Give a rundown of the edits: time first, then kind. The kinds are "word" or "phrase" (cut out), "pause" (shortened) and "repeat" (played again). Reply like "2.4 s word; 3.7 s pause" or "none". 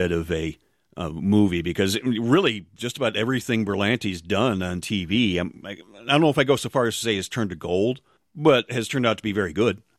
none